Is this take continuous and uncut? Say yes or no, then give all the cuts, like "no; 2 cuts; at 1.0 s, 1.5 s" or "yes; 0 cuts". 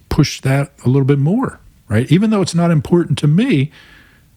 yes; 0 cuts